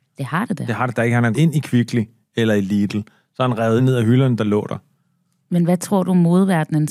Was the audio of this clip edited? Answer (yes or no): yes